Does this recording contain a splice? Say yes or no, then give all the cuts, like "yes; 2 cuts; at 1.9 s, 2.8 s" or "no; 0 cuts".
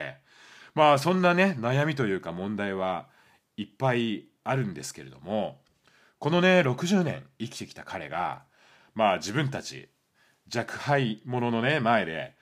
no; 0 cuts